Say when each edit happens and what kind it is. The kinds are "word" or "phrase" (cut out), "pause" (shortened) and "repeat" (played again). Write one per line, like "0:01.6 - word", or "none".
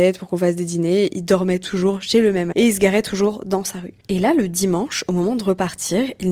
0:02.5 - word

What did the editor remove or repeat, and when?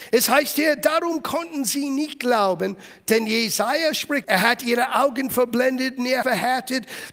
0:04.2 - word
0:06.2 - word

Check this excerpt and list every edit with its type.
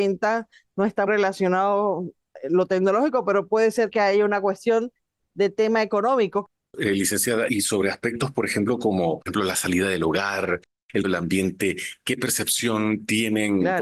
0:01.1 - word
0:03.9 - word
0:07.5 - word
0:09.3 - word
0:11.0 - word

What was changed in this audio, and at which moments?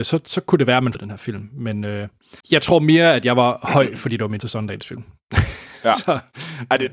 0:00.9 - phrase
0:02.4 - pause
0:04.4 - word

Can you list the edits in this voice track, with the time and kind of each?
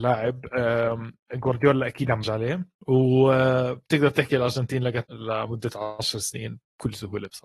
0:02.2 - word
0:02.8 - pause
0:05.1 - word

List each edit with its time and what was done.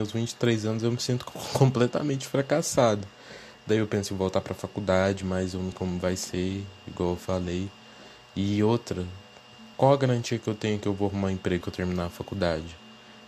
0:05.7 - word
0:09.7 - pause
0:11.6 - word

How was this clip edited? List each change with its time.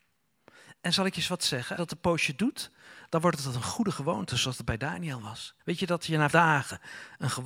0:01.8 - phrase
0:05.6 - pause
0:06.3 - word

